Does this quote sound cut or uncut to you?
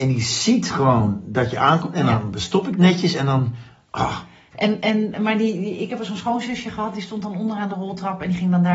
uncut